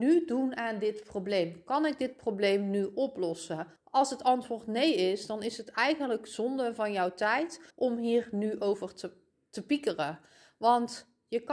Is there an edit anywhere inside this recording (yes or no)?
yes